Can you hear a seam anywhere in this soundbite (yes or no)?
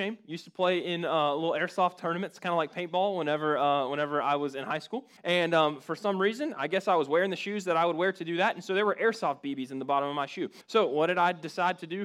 yes